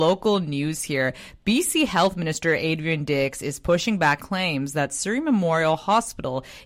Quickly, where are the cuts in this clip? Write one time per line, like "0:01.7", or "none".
0:04.2